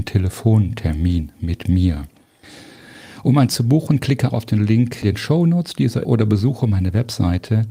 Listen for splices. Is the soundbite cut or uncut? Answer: cut